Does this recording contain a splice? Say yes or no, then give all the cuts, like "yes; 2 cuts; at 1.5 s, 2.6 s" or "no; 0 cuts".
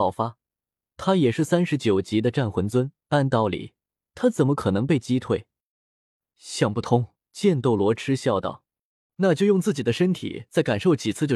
yes; 2 cuts; at 3.0 s, 7.2 s